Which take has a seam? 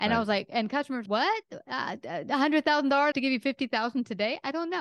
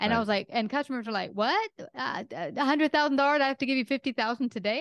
first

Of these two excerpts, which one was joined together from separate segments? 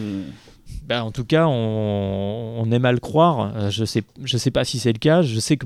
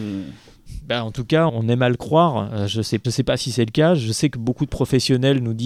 second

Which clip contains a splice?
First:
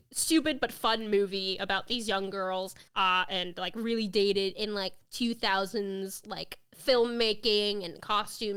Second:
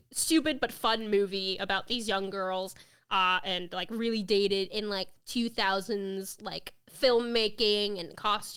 first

